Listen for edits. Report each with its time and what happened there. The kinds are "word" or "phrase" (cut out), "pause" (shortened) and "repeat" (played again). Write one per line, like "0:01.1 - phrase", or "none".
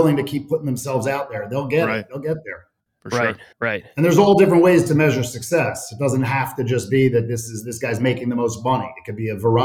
0:03.5 - pause